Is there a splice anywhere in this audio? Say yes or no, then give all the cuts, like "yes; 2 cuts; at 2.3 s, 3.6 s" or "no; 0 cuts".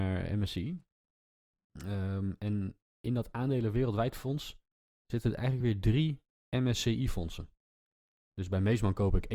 no; 0 cuts